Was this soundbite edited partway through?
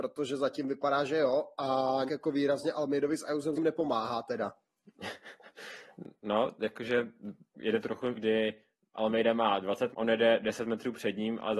yes; 5 cuts; at 2.1 s, 3.6 s, 7.8 s, 8.1 s, 9.9 s

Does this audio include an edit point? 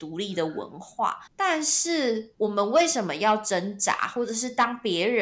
yes; 1 cut; at 1.3 s

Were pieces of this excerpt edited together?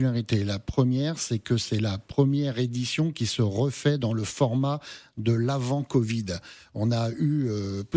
no; 0 cuts

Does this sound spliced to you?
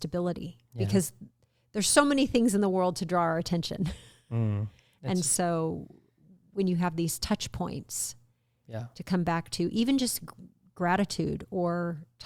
no; 0 cuts

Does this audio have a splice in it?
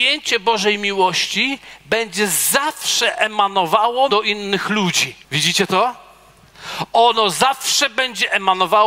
yes; 2 cuts; at 4.1 s, 5.2 s

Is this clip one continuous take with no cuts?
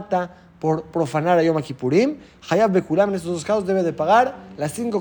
yes; 0 cuts

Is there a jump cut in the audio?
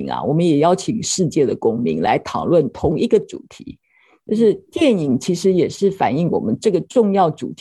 no; 0 cuts

